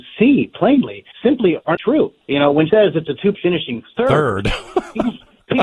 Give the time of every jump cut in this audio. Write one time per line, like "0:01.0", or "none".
0:01.1
0:01.7
0:02.2
0:02.7
0:03.3